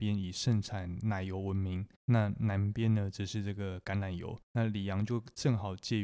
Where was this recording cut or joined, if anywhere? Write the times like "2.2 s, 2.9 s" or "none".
1.9 s, 4.4 s